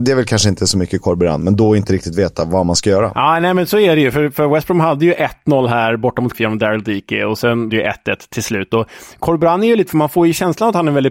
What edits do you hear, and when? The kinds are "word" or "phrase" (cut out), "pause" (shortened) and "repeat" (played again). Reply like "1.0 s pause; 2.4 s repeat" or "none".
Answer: 6.3 s word; 7.7 s word; 9.9 s word